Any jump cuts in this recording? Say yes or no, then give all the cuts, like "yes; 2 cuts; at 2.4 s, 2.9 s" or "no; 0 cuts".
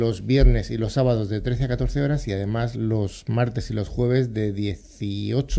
no; 0 cuts